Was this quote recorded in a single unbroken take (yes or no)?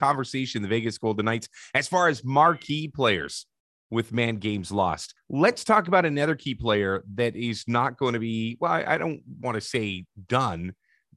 yes